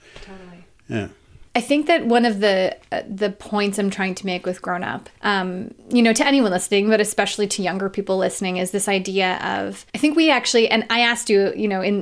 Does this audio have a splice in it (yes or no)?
yes